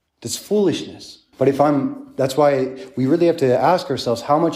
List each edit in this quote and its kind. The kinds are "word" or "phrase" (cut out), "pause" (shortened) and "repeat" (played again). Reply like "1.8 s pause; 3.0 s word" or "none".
1.3 s pause